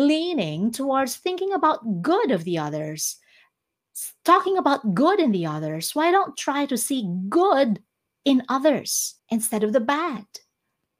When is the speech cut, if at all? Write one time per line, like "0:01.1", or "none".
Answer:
0:06.4
0:09.2